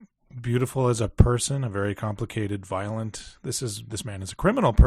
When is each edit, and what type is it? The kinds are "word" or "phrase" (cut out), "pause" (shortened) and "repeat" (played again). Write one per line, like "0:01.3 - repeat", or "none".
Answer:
none